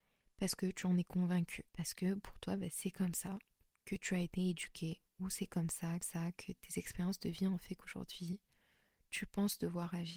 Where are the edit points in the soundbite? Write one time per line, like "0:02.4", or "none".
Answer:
0:01.7
0:05.1
0:06.0